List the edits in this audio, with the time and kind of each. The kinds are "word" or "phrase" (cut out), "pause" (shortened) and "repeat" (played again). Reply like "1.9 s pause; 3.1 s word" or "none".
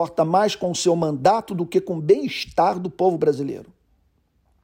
none